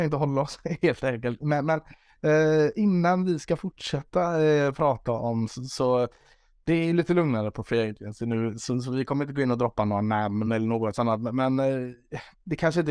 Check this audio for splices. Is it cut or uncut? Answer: uncut